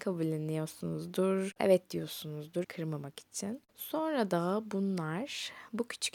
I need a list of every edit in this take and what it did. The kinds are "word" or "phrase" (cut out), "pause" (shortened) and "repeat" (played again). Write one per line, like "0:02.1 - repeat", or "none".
0:02.6 - word